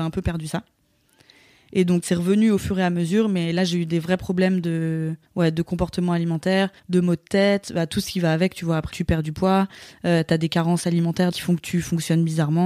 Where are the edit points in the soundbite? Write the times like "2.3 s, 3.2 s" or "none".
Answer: 2.0 s, 5.2 s, 6.8 s, 8.9 s, 11.3 s